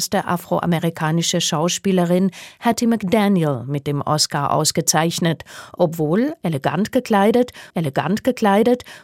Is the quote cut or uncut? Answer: cut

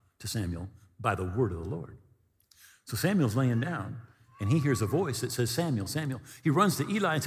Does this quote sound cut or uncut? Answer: uncut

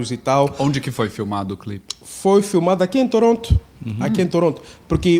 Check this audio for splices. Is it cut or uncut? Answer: uncut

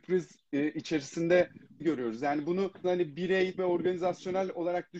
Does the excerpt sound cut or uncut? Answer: cut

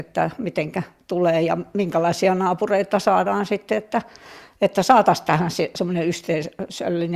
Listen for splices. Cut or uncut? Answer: uncut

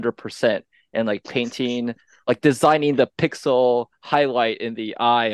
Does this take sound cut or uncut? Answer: uncut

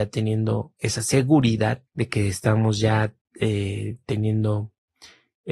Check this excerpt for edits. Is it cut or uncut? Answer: cut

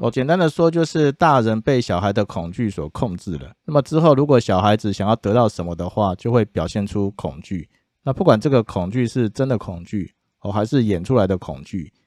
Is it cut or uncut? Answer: cut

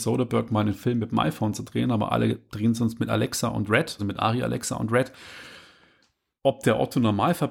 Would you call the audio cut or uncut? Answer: cut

